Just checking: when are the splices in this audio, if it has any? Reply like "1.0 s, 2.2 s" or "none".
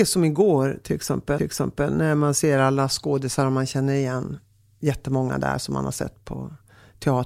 1.4 s